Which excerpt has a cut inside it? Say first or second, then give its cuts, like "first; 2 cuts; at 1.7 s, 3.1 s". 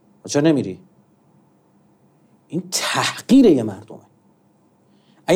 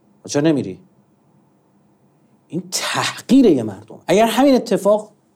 second; 1 cut; at 4.0 s